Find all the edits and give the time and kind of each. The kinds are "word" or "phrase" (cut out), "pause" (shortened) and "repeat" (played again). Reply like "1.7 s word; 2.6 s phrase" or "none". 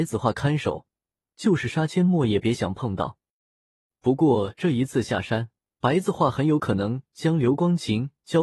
5.6 s pause